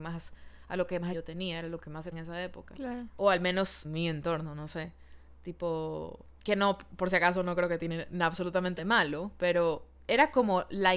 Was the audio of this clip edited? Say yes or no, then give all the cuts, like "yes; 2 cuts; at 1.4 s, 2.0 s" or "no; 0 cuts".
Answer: yes; 4 cuts; at 1.1 s, 2.1 s, 3.8 s, 8.8 s